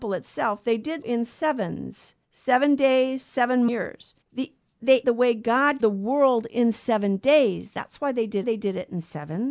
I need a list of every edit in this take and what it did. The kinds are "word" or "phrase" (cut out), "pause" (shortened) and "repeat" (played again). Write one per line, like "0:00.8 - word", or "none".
0:01.0 - word
0:02.2 - pause
0:03.7 - phrase
0:04.2 - pause
0:05.0 - word
0:05.8 - word
0:08.4 - repeat